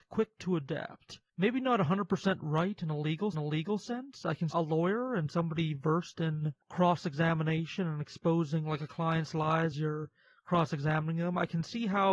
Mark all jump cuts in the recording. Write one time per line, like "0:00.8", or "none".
0:01.3
0:03.3
0:04.5
0:06.6
0:09.7